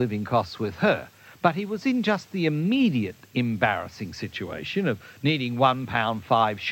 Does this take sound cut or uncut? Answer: uncut